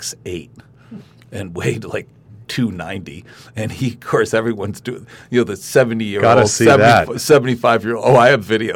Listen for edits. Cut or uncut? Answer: uncut